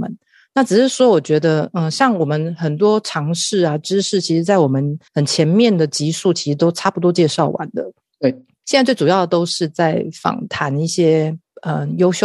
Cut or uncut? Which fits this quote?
cut